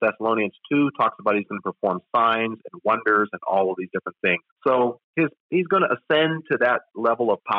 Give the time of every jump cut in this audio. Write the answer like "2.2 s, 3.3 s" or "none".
4.5 s

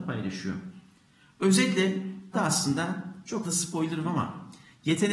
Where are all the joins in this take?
2.3 s, 3.4 s, 4.0 s

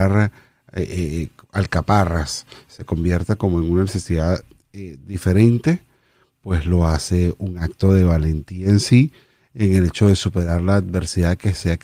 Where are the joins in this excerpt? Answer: none

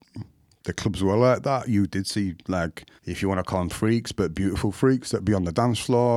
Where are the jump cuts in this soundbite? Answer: 3.0 s

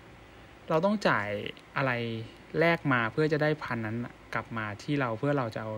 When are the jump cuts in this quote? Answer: 1.7 s

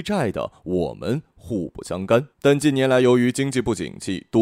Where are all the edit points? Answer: 2.3 s

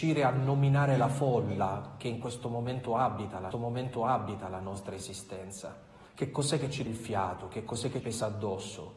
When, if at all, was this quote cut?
3.5 s, 6.1 s, 6.9 s, 8.0 s

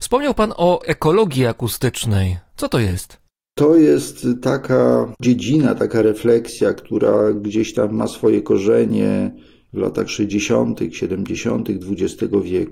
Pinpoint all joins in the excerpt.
none

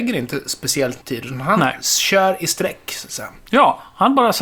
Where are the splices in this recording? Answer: 1.0 s

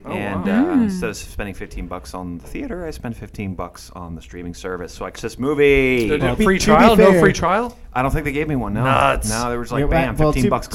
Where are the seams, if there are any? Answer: 5.1 s, 6.4 s

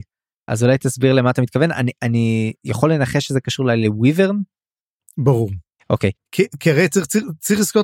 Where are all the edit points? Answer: none

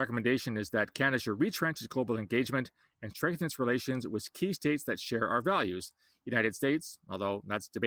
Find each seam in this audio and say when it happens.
none

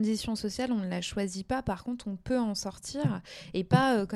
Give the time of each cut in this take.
none

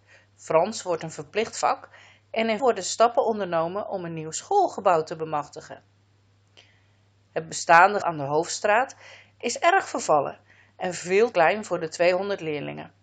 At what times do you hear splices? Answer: 2.6 s, 8.0 s, 11.3 s

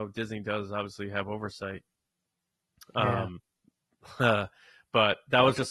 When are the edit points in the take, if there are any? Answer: none

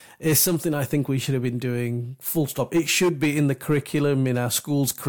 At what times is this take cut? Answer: none

